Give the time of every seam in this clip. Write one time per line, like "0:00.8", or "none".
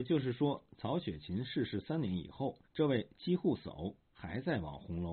0:02.7